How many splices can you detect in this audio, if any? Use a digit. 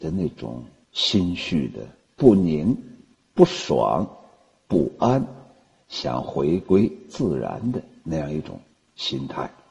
0